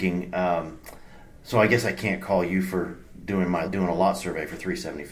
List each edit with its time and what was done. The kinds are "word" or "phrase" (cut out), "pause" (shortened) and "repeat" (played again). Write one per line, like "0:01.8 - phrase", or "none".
0:03.6 - word